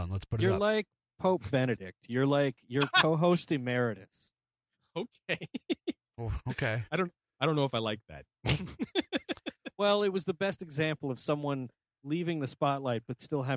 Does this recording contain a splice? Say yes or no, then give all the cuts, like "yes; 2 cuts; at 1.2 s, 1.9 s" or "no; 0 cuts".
no; 0 cuts